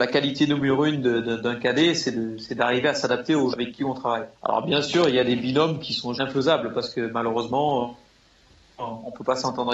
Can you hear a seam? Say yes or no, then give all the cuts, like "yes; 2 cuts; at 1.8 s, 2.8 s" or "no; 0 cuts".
yes; 3 cuts; at 3.5 s, 4.4 s, 6.2 s